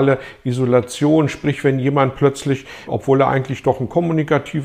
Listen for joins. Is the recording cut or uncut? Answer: cut